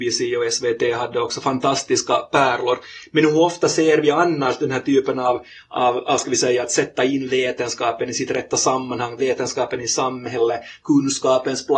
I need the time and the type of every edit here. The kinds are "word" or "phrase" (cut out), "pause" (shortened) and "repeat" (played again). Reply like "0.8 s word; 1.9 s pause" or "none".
none

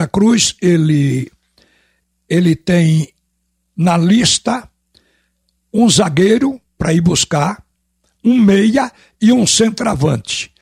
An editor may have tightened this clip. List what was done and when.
none

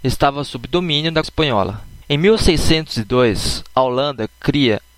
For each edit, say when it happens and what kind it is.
1.2 s word; 2.0 s pause

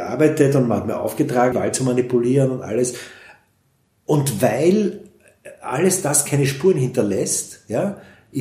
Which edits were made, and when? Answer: 1.5 s word

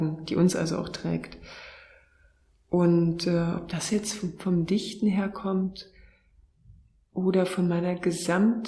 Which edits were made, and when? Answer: none

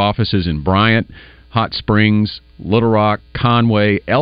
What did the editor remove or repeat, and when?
none

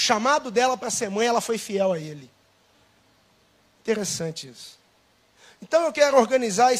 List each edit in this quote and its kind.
none

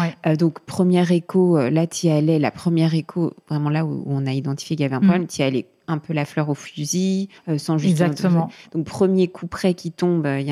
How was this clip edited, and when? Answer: 7.4 s pause

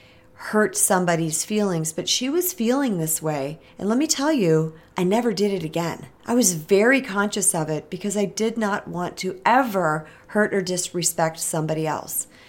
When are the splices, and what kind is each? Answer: 3.7 s pause; 6.2 s pause

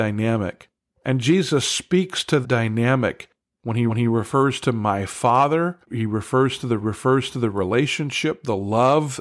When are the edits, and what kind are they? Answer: 2.4 s word; 3.9 s repeat; 5.8 s pause; 6.8 s repeat

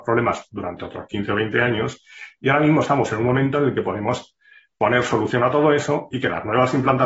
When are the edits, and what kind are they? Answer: none

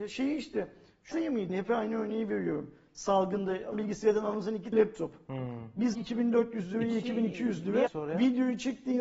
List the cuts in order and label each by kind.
1.1 s word; 1.5 s word; 3.7 s word; 4.7 s word; 5.9 s word; 7.9 s word

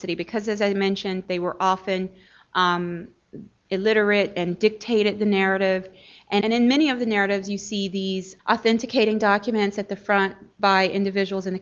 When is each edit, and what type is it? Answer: 3.6 s word; 6.4 s word; 8.4 s word

